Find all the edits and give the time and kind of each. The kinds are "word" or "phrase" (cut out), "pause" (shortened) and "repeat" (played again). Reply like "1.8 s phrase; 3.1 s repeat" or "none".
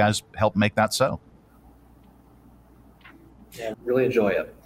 3.7 s phrase